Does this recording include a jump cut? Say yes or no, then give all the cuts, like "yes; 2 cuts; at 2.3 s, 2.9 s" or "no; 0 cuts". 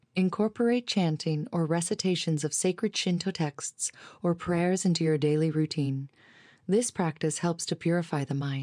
no; 0 cuts